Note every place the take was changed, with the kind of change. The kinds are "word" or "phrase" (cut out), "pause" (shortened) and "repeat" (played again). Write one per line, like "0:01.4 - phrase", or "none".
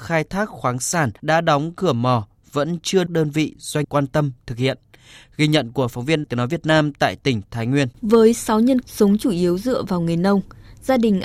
0:01.2 - pause
0:03.1 - phrase
0:03.8 - word
0:06.2 - word
0:07.9 - pause
0:08.8 - word